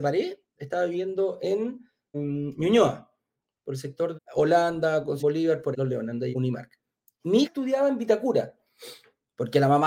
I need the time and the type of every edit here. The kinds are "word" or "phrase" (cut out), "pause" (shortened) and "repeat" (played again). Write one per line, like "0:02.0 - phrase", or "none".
0:02.1 - word
0:04.1 - word
0:05.2 - word
0:05.7 - word
0:06.3 - word
0:07.4 - word